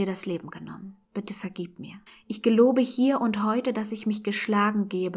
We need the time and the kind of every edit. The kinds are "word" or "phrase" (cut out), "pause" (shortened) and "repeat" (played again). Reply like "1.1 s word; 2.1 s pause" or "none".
1.0 s pause; 2.1 s pause